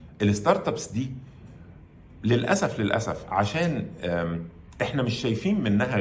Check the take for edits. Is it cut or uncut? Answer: uncut